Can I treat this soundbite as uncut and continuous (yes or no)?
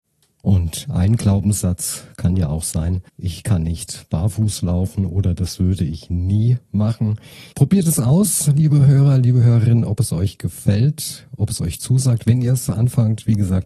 no